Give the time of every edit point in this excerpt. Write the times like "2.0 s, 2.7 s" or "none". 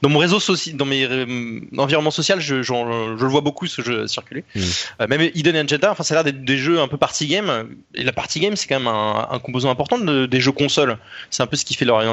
none